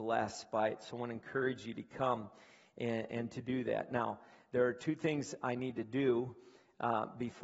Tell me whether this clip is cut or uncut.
uncut